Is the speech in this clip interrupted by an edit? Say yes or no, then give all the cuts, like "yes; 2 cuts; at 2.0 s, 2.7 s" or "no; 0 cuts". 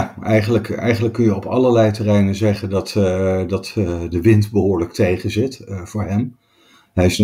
no; 0 cuts